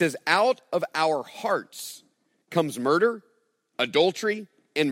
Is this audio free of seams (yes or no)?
yes